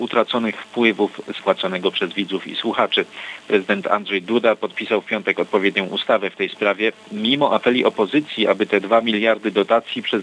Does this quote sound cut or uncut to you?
cut